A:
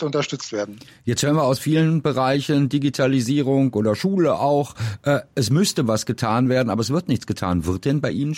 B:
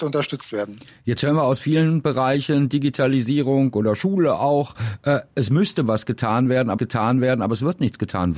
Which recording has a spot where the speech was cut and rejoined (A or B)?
B